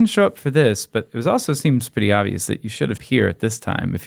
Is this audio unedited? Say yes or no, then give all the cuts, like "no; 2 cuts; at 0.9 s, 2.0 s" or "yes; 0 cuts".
no; 1 cut; at 3.0 s